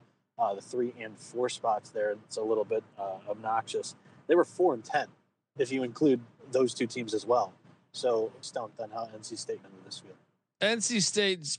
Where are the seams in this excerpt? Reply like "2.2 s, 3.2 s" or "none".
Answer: 8.4 s, 9.6 s